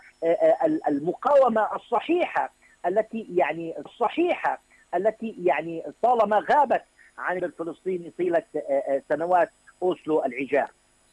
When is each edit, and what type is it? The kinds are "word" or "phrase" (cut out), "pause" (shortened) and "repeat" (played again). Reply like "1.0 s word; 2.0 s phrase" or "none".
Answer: 3.9 s repeat; 7.4 s word